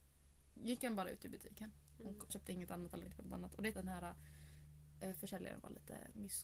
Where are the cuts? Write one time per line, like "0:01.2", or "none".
0:02.3
0:03.1
0:03.7